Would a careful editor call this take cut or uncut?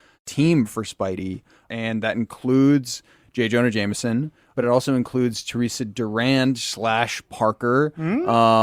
uncut